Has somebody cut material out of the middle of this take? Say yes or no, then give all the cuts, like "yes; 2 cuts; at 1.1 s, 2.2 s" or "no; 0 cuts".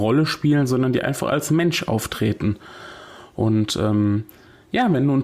no; 0 cuts